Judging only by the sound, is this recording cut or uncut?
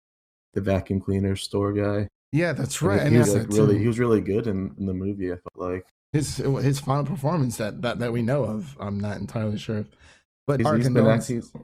cut